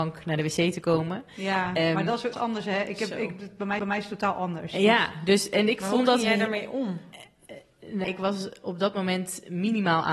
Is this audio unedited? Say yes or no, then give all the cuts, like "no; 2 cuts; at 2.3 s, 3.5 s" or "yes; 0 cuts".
no; 3 cuts; at 2.3 s, 3.8 s, 8.0 s